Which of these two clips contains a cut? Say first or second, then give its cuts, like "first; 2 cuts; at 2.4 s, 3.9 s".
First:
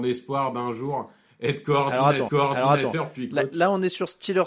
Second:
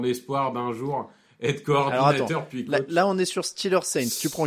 first; 1 cut; at 2.3 s